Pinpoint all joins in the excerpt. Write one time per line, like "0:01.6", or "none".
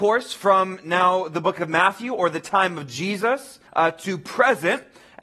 0:03.7